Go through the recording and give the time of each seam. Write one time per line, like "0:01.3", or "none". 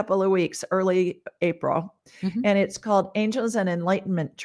none